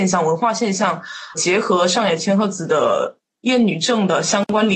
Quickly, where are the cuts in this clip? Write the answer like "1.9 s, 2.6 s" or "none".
1.3 s